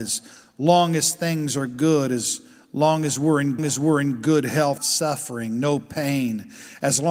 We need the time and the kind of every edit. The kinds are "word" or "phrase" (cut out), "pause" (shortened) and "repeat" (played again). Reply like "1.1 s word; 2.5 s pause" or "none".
3.6 s repeat; 4.8 s phrase